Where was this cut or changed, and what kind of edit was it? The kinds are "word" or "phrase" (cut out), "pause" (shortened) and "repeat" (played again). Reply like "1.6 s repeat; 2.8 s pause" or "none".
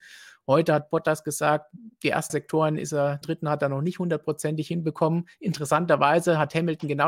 2.3 s word; 3.2 s phrase